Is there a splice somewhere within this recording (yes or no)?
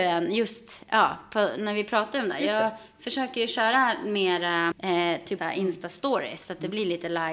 yes